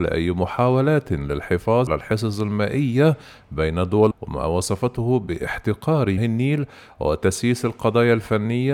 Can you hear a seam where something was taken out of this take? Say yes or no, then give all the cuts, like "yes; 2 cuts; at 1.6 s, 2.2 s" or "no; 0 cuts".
yes; 3 cuts; at 1.9 s, 4.1 s, 6.2 s